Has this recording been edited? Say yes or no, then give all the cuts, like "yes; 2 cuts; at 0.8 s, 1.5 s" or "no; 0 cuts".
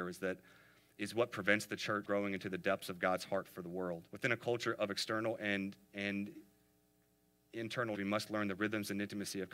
yes; 4 cuts; at 2.0 s, 4.1 s, 5.8 s, 7.9 s